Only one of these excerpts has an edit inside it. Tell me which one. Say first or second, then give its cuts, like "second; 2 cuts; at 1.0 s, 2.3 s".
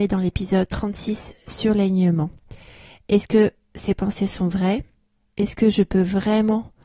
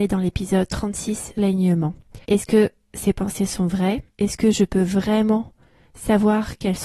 second; 3 cuts; at 1.4 s, 2.2 s, 4.1 s